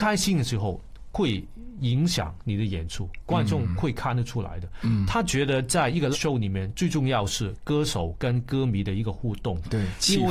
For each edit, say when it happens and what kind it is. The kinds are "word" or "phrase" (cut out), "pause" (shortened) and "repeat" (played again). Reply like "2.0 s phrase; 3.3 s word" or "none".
6.1 s word